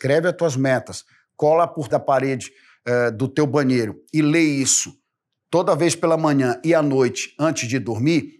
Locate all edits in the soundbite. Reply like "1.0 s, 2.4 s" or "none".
1.9 s